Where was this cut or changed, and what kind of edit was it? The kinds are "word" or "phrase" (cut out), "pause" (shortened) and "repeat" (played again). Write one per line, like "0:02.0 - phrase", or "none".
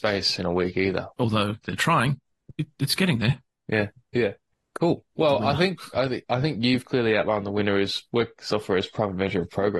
0:01.1 - pause
0:05.1 - pause